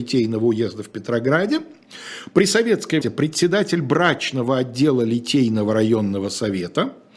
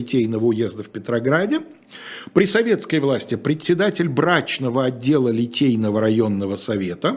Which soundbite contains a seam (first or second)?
first